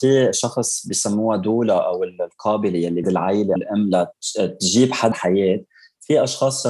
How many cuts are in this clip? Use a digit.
3